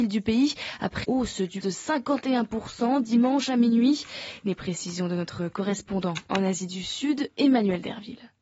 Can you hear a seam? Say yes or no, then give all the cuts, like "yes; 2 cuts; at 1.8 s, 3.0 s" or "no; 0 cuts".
yes; 2 cuts; at 1.0 s, 1.6 s